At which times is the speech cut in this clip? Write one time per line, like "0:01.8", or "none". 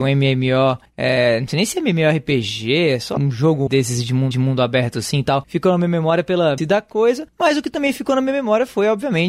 0:03.2
0:03.7
0:04.3
0:06.6